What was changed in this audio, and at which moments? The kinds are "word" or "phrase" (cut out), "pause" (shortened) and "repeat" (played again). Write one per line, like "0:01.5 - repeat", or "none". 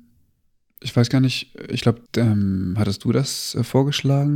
0:02.1 - pause